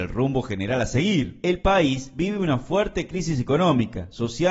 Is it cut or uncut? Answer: uncut